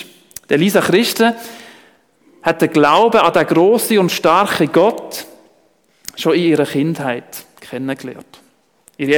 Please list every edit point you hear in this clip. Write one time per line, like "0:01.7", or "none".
none